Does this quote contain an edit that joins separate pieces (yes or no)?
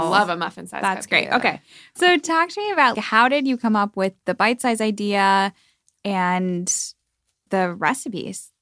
yes